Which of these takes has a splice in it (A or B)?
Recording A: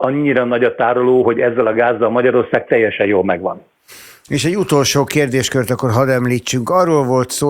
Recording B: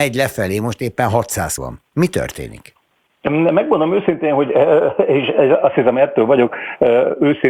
B